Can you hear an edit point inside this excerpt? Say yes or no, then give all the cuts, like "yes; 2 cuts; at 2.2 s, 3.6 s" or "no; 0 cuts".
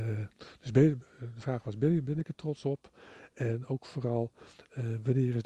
no; 0 cuts